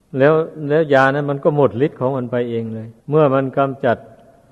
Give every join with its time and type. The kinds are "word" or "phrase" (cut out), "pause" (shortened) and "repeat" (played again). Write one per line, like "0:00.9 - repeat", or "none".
0:03.0 - pause